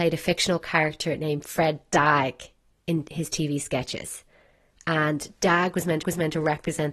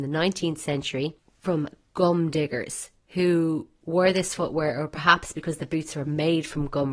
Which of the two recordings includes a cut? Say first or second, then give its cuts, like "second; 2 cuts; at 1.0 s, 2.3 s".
first; 1 cut; at 6.0 s